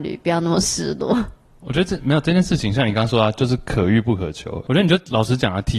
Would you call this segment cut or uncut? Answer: uncut